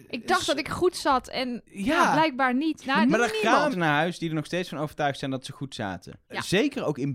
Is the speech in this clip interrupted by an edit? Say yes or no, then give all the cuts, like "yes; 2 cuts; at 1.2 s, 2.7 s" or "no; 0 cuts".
yes; 2 cuts; at 3.7 s, 6.2 s